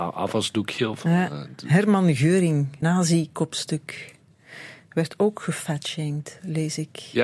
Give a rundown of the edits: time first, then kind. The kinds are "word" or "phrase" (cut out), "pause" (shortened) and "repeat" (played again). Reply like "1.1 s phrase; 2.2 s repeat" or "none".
2.8 s word